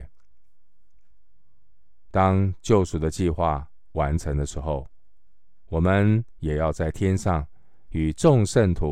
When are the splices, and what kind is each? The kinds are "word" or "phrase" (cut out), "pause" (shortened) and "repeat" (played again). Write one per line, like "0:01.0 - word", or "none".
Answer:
0:02.1 - phrase